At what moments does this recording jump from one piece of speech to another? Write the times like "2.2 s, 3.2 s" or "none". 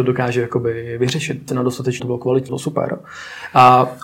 1.5 s, 2.0 s, 2.5 s